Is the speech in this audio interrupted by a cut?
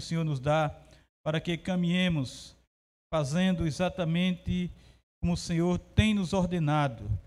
no; 0 cuts

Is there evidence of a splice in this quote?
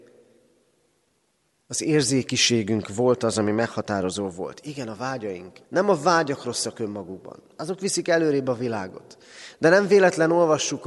yes; 1 cut; at 5.6 s

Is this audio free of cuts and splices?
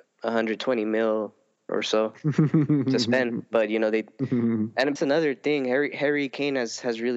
no; 2 cuts; at 1.7 s, 5.0 s

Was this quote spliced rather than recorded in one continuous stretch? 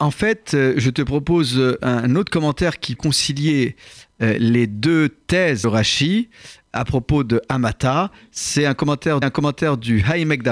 yes; 3 cuts; at 3.0 s, 5.6 s, 9.2 s

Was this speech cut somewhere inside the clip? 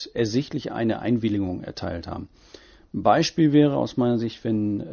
no; 0 cuts

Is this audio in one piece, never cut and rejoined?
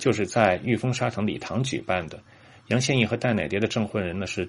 yes; 0 cuts

